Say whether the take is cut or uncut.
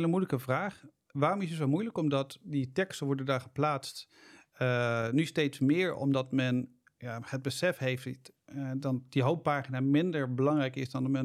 uncut